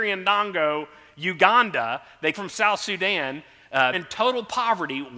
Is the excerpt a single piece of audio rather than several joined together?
no; 2 cuts; at 2.3 s, 3.9 s

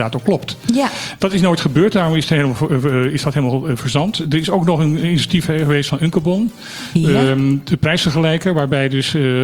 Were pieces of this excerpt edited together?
no; 0 cuts

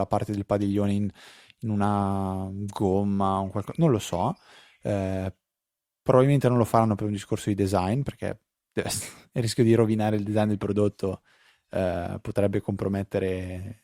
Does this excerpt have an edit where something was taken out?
no; 0 cuts

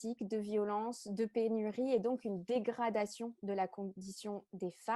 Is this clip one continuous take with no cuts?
yes; 0 cuts

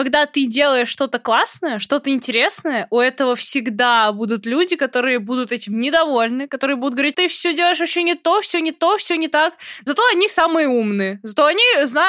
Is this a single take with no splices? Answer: no; 2 cuts; at 7.1 s, 8.7 s

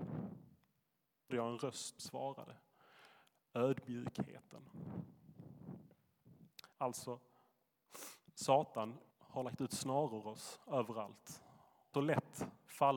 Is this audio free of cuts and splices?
no; 6 cuts; at 1.3 s, 2.0 s, 6.7 s, 9.1 s, 10.2 s, 11.9 s

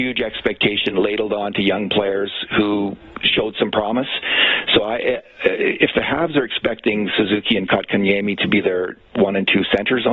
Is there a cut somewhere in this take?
no; 0 cuts

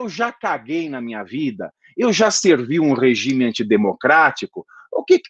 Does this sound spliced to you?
no; 0 cuts

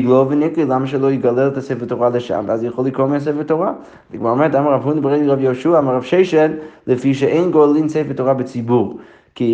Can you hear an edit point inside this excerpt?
no; 0 cuts

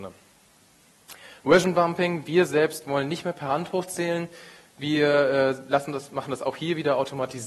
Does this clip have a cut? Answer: no; 0 cuts

